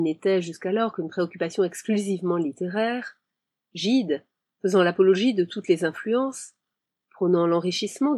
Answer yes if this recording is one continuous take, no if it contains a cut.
yes